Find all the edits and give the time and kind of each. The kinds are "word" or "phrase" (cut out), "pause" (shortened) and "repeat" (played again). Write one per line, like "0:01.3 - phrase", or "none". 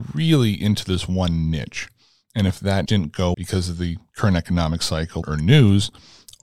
0:02.9 - word
0:03.3 - word
0:05.2 - word